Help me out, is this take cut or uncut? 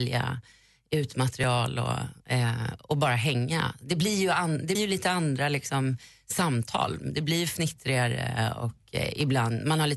cut